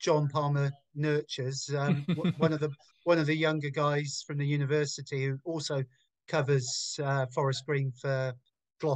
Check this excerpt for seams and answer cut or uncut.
uncut